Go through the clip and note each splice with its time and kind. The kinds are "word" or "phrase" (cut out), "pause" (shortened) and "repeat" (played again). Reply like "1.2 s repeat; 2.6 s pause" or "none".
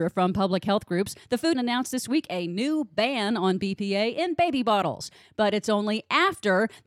1.5 s phrase